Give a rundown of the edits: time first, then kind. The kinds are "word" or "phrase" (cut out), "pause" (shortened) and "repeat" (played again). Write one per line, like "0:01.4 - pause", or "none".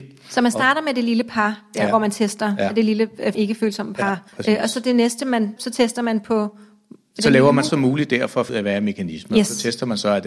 0:03.3 - word
0:04.3 - pause
0:05.6 - word
0:07.7 - word
0:08.5 - word